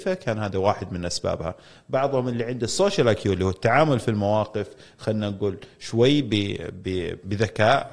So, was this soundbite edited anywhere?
no; 0 cuts

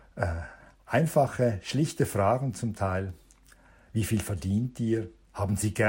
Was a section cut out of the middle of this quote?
no; 0 cuts

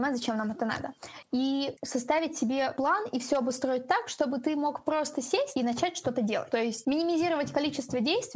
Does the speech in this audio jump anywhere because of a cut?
no; 0 cuts

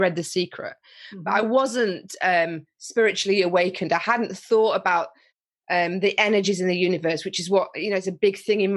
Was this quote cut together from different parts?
no; 0 cuts

